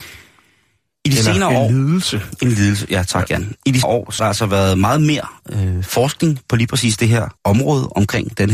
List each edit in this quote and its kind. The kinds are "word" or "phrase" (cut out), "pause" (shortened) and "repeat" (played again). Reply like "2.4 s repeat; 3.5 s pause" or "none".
3.8 s word; 4.2 s word; 7.4 s pause